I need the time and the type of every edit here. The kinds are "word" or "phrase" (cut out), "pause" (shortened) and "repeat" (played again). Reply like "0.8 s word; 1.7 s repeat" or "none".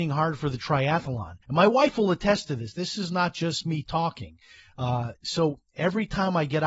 1.4 s pause